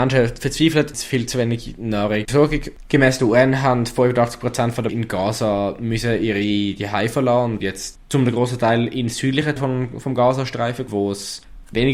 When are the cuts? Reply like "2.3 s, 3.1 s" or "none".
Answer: 0.9 s, 2.3 s, 4.9 s, 7.6 s, 9.6 s, 10.9 s